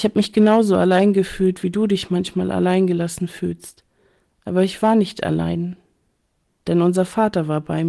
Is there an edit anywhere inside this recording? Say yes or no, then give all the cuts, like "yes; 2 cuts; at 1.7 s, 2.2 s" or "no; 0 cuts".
no; 0 cuts